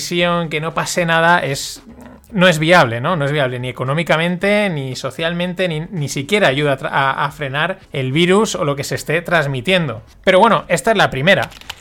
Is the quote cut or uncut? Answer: cut